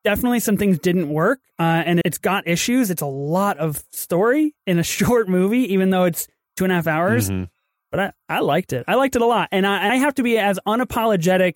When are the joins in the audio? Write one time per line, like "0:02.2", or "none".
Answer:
0:02.0
0:08.2
0:09.9